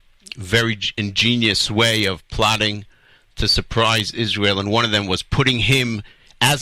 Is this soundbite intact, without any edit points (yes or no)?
yes